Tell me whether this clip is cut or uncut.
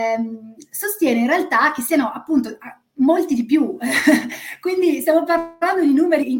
uncut